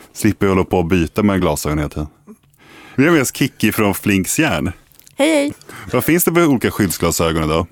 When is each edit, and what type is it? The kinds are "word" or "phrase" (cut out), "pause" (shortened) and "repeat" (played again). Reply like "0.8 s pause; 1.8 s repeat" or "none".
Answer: none